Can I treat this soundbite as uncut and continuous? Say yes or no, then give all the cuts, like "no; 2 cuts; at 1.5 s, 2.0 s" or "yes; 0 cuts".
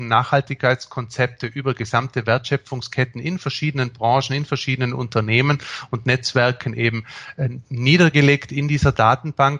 yes; 0 cuts